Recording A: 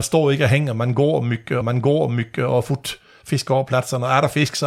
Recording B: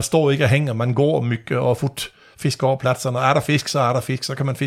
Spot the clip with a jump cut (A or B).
A